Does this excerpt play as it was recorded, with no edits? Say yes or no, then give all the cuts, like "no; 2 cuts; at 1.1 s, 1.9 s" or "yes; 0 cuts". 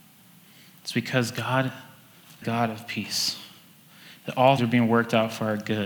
no; 2 cuts; at 2.4 s, 4.6 s